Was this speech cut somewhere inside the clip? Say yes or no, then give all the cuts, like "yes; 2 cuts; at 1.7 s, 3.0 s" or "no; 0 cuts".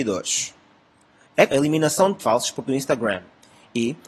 yes; 3 cuts; at 1.5 s, 2.2 s, 2.6 s